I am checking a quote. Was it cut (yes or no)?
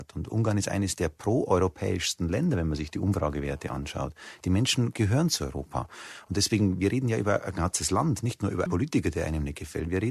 yes